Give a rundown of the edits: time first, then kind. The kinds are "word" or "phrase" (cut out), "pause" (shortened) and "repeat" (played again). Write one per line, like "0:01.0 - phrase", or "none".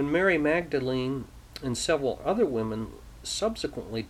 none